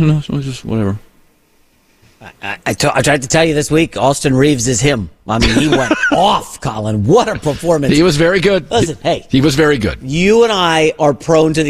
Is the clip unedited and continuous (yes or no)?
yes